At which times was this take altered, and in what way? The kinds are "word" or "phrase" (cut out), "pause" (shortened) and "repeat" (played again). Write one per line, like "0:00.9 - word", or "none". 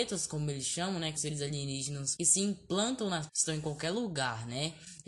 0:01.2 - word
0:02.2 - word
0:03.3 - word